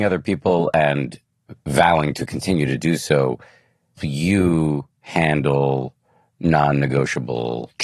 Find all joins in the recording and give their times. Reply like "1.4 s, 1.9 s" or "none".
4.0 s